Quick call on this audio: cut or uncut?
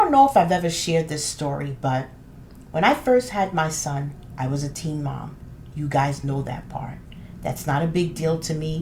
uncut